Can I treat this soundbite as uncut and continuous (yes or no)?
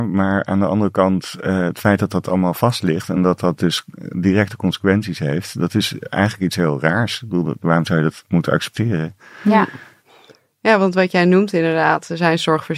yes